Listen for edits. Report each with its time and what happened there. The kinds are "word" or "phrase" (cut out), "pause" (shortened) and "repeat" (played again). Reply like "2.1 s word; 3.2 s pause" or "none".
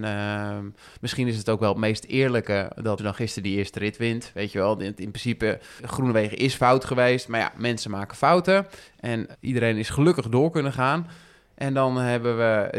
3.0 s word; 5.8 s word; 9.3 s word